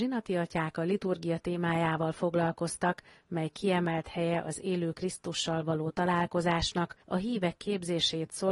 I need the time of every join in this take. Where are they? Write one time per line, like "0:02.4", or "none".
0:07.0